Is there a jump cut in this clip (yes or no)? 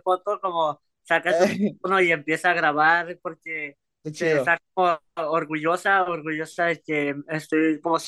no